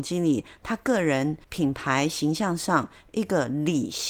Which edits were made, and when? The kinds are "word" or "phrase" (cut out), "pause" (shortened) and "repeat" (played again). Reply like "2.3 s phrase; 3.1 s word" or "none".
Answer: 1.4 s pause